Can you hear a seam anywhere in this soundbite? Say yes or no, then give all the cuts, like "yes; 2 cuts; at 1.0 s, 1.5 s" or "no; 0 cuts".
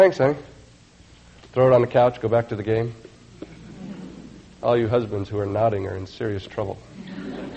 no; 0 cuts